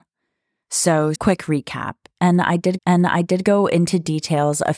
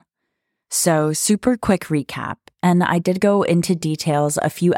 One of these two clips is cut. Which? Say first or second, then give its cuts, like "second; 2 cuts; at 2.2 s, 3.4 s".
first; 2 cuts; at 1.2 s, 2.8 s